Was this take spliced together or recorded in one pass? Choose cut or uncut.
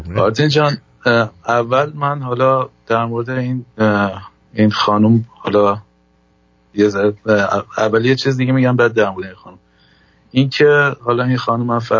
uncut